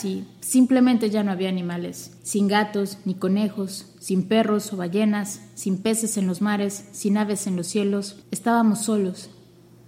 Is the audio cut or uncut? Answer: cut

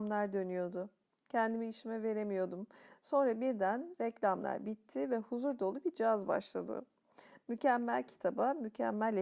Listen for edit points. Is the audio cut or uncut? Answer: uncut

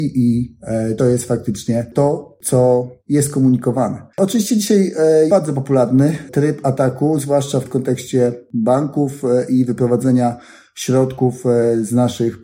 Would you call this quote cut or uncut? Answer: cut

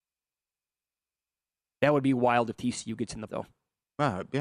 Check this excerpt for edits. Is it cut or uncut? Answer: cut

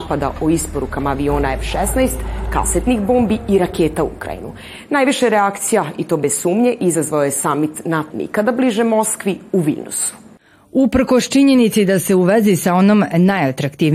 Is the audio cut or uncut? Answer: cut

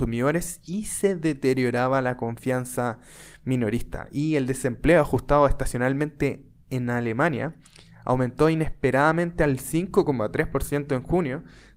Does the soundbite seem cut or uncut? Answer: uncut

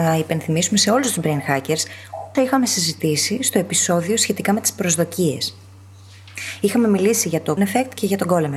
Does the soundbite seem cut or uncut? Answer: cut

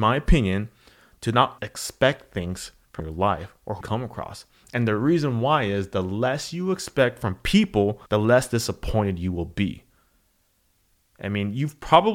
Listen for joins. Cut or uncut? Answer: cut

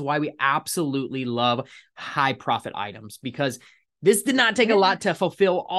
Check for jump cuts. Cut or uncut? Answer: uncut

